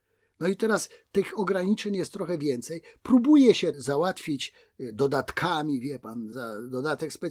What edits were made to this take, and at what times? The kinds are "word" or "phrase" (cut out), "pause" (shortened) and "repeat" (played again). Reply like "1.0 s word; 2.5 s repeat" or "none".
3.7 s word; 6.3 s word